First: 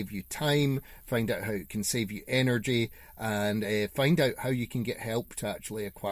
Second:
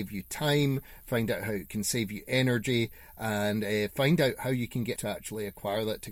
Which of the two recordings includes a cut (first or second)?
second